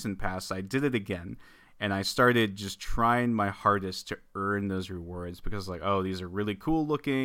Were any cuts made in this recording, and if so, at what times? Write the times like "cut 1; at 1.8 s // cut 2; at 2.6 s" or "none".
none